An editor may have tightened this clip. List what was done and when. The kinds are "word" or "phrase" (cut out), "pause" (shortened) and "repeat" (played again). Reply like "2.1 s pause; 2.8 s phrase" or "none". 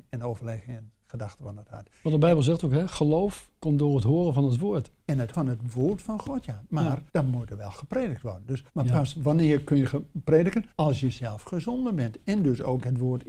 5.0 s pause; 5.3 s word; 7.1 s pause; 8.7 s pause; 10.7 s pause

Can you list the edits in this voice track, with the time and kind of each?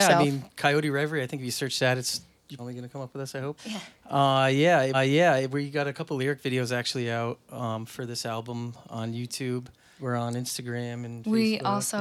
2.6 s word; 3.6 s phrase; 4.9 s repeat; 10.0 s word

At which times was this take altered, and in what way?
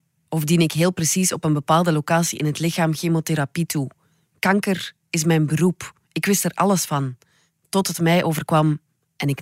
none

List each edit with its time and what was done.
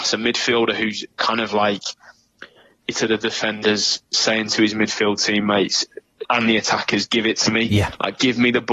2.9 s word; 6.2 s word

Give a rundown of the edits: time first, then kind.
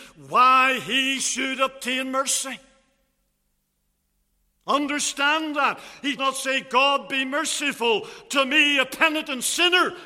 6.2 s word

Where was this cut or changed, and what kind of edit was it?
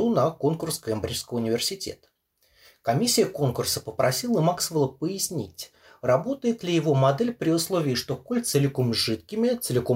8.5 s word

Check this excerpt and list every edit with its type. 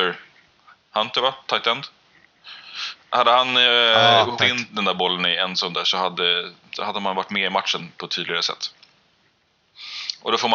4.4 s word

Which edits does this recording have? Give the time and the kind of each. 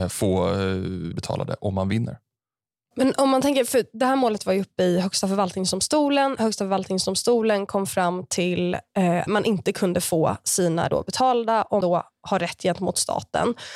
1.1 s word; 9.3 s word; 10.9 s word; 11.8 s word

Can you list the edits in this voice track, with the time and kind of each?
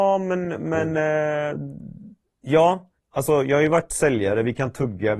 3.0 s pause

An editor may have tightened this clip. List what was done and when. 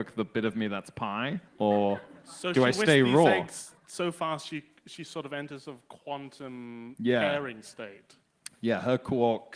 1.5 s pause; 3.8 s pause

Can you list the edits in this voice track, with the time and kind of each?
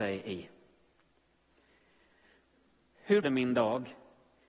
3.2 s word

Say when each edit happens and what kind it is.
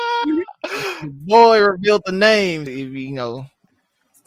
2.7 s word

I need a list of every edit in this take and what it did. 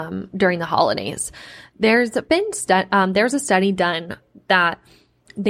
none

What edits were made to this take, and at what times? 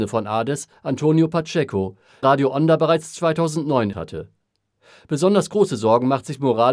2.2 s word; 3.9 s word

